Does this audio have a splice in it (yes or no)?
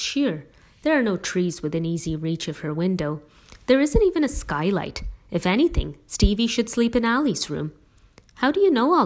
no